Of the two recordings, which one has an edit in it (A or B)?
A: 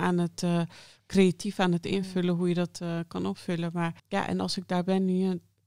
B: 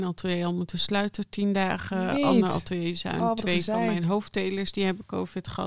A